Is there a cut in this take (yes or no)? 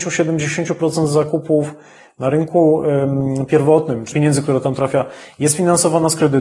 yes